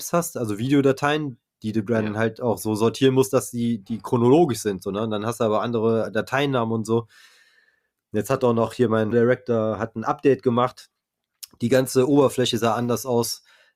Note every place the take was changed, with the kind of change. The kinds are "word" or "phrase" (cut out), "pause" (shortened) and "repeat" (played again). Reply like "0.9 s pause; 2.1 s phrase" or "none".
9.1 s phrase